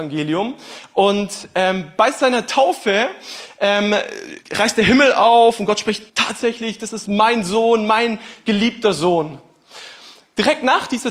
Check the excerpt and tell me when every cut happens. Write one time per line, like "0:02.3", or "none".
0:04.4
0:06.1